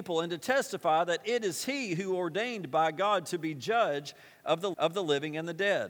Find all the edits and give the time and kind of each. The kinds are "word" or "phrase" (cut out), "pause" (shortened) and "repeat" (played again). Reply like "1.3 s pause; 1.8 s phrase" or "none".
4.7 s repeat